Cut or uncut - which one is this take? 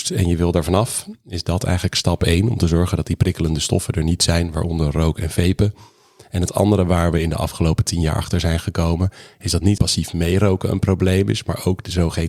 cut